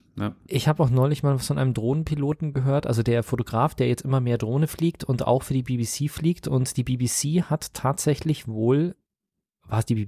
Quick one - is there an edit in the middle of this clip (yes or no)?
no